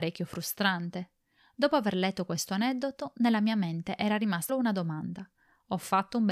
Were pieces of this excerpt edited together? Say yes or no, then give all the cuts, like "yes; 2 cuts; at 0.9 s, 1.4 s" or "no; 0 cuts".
yes; 1 cut; at 4.5 s